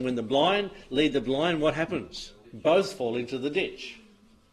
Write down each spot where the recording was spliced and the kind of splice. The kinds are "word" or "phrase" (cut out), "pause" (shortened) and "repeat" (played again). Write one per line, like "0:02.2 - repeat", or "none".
0:02.4 - pause